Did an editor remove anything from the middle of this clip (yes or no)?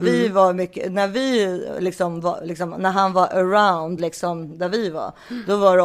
no